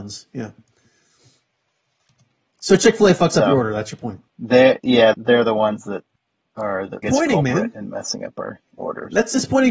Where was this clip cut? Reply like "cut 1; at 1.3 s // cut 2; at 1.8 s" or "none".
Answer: cut 1; at 4.3 s // cut 2; at 5.1 s // cut 3; at 6.2 s // cut 4; at 7.0 s // cut 5; at 8.7 s